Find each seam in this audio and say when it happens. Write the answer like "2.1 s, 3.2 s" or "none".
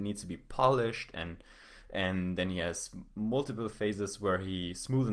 none